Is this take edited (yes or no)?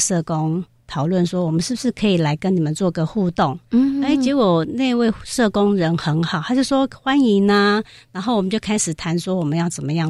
no